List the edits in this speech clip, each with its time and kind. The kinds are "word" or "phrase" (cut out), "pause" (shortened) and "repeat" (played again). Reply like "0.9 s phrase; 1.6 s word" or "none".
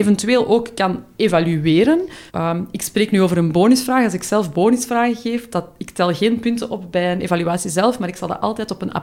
2.3 s pause

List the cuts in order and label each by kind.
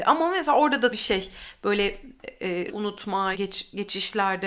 0.9 s word; 2.7 s word; 3.3 s word

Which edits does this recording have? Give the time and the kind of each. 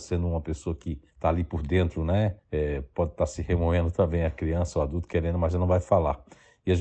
1.1 s pause; 2.4 s pause

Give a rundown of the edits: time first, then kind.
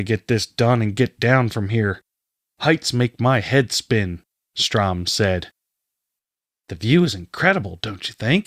none

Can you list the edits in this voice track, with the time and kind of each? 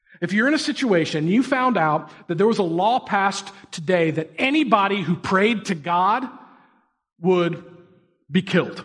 none

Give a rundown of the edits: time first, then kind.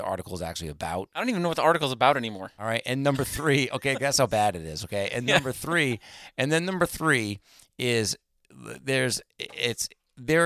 none

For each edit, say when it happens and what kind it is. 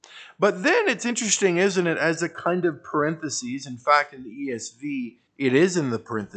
5.3 s pause

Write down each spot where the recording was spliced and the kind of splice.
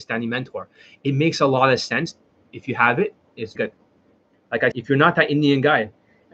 3.6 s word; 4.7 s word

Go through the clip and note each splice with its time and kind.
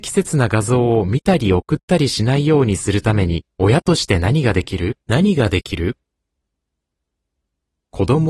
3.5 s pause; 5.0 s pause

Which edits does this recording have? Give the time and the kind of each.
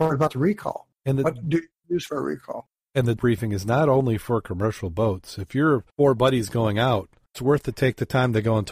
1.0 s pause; 3.2 s word; 5.9 s pause; 7.3 s word

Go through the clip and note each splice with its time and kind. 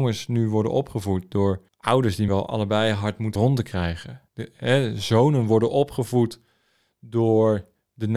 1.7 s pause; 2.3 s word; 3.4 s phrase; 4.3 s pause

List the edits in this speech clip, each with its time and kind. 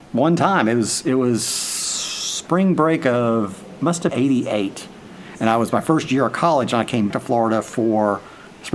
4.1 s word; 7.1 s word

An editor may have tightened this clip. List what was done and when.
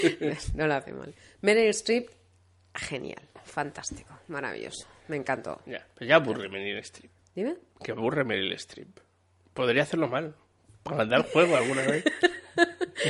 none

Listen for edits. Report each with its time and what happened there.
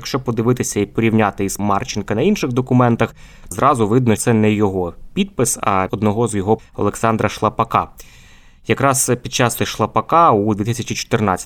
1.6 s word; 3.5 s word; 4.2 s word; 5.9 s word; 6.6 s word; 9.6 s word

